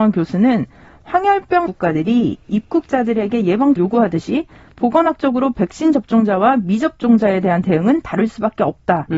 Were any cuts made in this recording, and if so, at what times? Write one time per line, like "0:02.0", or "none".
0:01.7
0:03.8